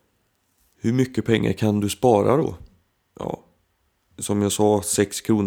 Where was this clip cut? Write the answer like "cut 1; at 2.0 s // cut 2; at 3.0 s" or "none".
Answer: none